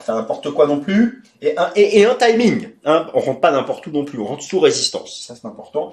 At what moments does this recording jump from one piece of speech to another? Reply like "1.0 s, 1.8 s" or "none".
none